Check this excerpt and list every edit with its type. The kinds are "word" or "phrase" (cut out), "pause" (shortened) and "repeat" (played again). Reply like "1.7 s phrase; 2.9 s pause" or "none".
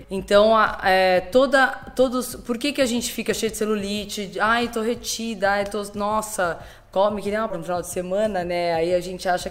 7.5 s word